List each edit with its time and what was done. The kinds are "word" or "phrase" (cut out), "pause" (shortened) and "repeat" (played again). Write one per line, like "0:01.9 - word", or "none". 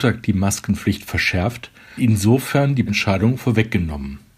0:02.0 - word
0:02.9 - word